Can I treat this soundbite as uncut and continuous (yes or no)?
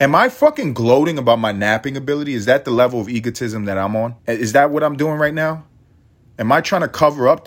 no